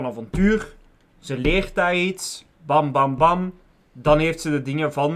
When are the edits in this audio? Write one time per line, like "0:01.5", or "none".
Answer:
0:02.5